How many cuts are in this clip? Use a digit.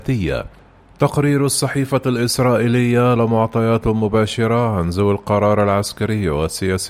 1